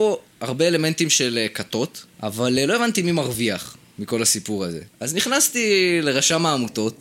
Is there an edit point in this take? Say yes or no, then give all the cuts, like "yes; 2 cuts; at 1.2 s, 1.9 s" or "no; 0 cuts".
yes; 2 cuts; at 2.1 s, 4.9 s